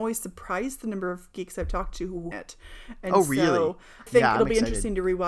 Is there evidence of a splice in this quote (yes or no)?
yes